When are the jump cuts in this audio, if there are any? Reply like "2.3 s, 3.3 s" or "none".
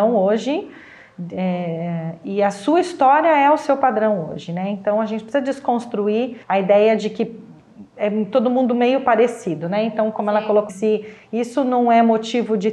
6.4 s, 10.7 s